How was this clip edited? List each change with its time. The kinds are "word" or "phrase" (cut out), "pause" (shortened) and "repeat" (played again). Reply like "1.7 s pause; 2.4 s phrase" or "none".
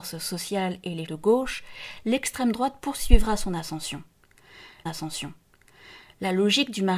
1.1 s word; 4.9 s repeat